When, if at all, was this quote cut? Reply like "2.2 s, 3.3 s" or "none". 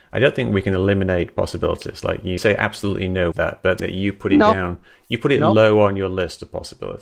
2.4 s, 3.3 s, 3.8 s